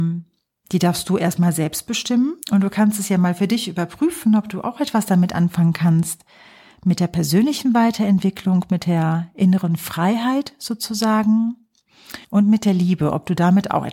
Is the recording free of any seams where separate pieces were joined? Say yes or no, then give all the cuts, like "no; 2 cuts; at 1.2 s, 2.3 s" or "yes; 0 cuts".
no; 2 cuts; at 2.4 s, 12.2 s